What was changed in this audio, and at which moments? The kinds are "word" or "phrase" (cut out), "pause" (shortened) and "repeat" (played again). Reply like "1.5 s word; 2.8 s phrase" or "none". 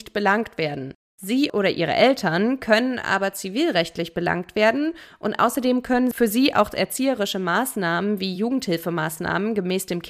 none